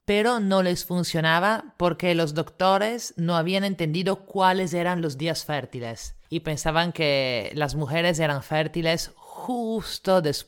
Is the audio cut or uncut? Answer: uncut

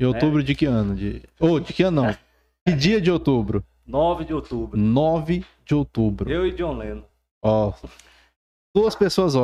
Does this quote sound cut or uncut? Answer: uncut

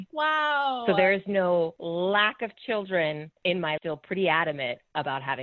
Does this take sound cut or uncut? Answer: cut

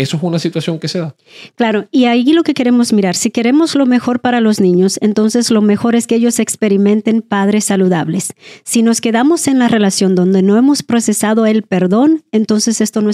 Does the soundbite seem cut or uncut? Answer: uncut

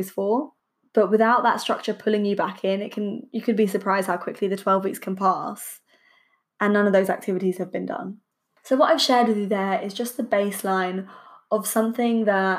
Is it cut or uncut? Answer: uncut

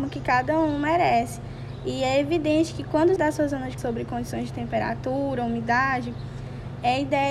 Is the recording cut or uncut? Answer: cut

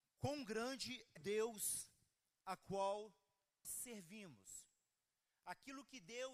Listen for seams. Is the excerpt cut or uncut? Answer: cut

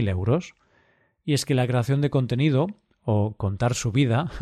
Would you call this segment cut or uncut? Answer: uncut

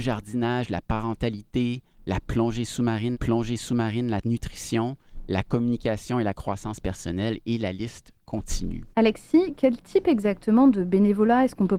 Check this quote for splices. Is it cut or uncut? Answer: cut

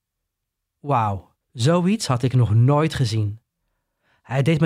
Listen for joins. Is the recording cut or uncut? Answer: cut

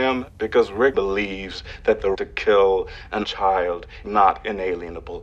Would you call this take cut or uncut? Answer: cut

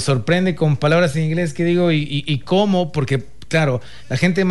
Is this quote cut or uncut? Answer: uncut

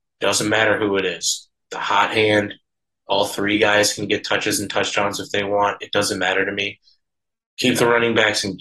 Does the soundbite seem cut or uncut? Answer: uncut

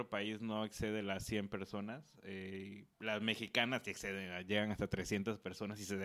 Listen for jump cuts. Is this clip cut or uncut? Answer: cut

